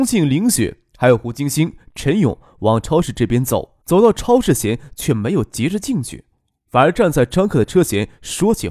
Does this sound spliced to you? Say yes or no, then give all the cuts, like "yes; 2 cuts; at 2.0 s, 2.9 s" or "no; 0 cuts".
yes; 1 cut; at 3.8 s